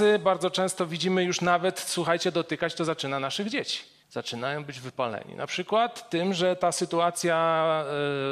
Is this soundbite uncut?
no; 1 cut; at 4.0 s

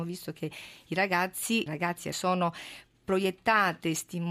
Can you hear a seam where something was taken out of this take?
yes; 2 cuts; at 1.7 s, 2.1 s

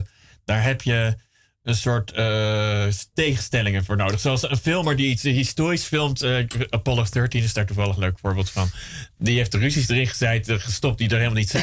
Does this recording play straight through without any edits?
yes; 0 cuts

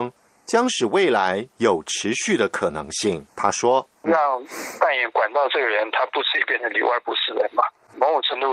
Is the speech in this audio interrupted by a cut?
yes; 1 cut; at 3.3 s

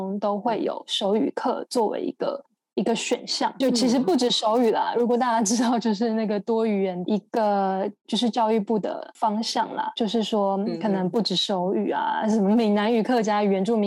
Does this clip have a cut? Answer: yes; 1 cut; at 3.6 s

